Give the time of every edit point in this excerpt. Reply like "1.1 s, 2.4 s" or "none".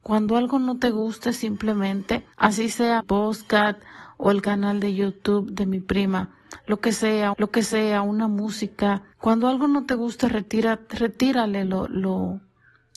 2.3 s, 3.0 s, 7.3 s, 9.1 s, 11.9 s